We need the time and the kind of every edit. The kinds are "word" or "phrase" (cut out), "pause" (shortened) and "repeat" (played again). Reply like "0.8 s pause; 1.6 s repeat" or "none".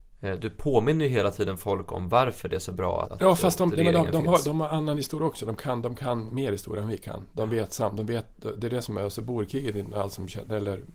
3.0 s word